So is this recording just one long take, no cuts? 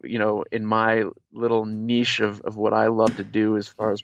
yes; 0 cuts

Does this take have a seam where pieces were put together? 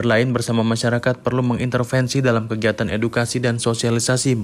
no; 0 cuts

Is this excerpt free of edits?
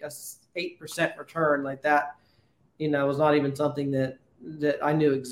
yes; 0 cuts

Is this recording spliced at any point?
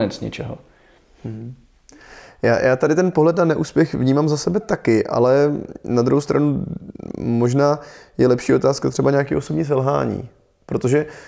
no; 0 cuts

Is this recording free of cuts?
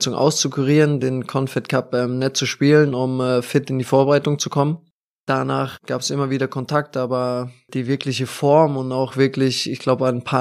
yes; 0 cuts

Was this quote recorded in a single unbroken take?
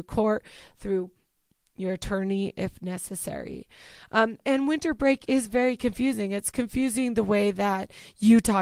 yes; 0 cuts

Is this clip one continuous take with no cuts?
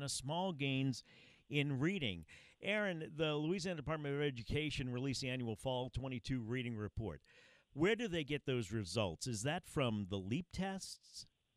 yes; 0 cuts

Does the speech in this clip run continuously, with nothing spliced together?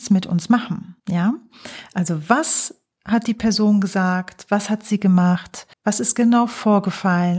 no; 2 cuts; at 1.0 s, 5.7 s

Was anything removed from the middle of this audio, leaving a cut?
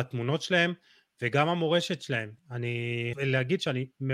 yes; 1 cut; at 3.1 s

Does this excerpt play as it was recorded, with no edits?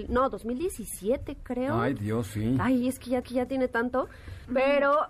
no; 1 cut; at 3.2 s

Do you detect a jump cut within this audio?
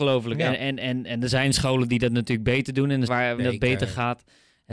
yes; 2 cuts; at 3.1 s, 3.4 s

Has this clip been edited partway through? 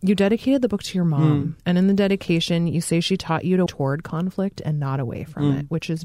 yes; 2 cuts; at 1.6 s, 3.7 s

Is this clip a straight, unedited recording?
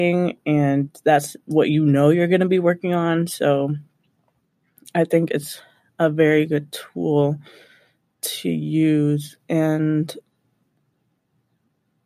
yes; 0 cuts

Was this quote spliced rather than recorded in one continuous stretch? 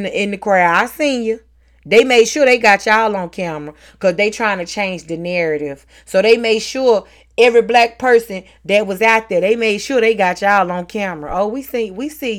no; 0 cuts

